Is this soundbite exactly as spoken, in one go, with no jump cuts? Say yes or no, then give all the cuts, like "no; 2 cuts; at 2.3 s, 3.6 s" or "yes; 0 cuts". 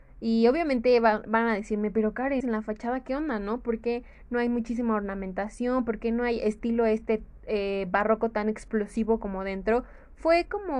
no; 1 cut; at 2.4 s